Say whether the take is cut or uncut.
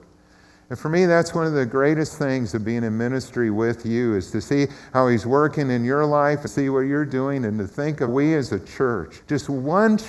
cut